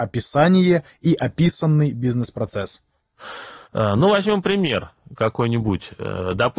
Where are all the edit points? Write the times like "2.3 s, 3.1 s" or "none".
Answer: 3.6 s